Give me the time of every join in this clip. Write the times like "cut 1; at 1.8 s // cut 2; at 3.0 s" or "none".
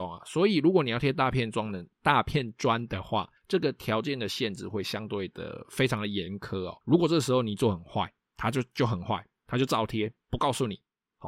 cut 1; at 3.4 s // cut 2; at 6.8 s